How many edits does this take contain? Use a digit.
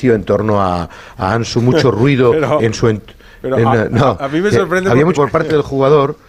2